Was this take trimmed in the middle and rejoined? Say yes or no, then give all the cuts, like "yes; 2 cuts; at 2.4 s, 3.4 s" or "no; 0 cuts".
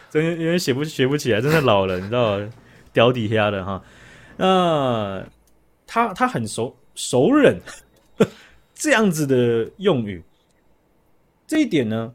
no; 0 cuts